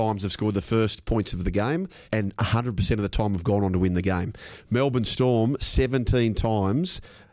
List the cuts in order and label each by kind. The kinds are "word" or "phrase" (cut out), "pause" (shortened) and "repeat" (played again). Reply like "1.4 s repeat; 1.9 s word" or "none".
2.0 s pause

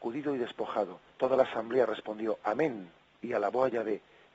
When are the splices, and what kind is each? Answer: 1.1 s pause

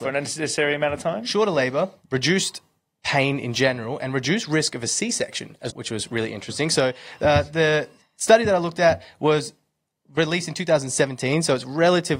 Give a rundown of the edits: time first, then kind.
5.7 s word

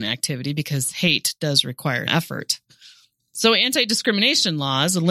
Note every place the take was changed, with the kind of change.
2.1 s word

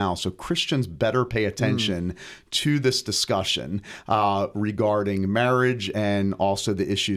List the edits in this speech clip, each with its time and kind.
none

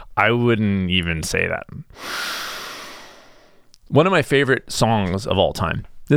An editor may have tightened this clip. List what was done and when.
none

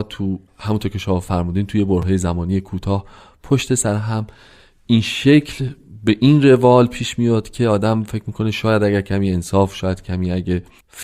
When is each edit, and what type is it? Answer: none

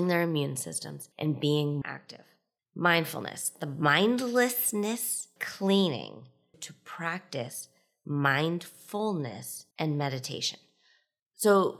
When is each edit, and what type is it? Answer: 1.1 s pause; 1.8 s word; 5.4 s word; 6.5 s phrase; 9.7 s pause

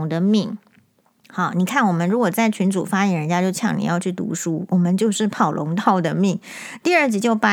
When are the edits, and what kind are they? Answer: none

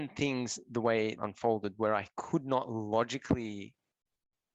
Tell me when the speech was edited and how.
1.2 s phrase

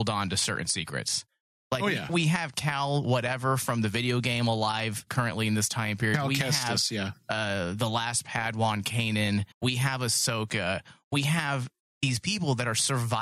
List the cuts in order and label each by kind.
9.5 s pause

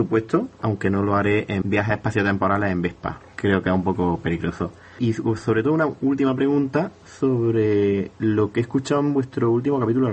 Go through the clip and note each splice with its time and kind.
1.6 s word

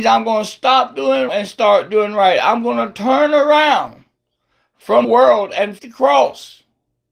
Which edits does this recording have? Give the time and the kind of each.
1.3 s word; 5.0 s word; 5.8 s word

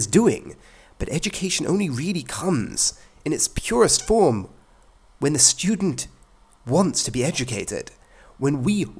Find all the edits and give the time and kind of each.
none

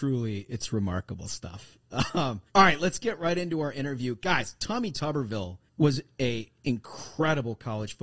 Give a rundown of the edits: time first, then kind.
2.5 s pause; 5.7 s pause

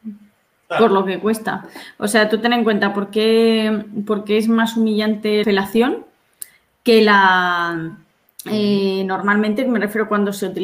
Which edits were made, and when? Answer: 5.4 s word

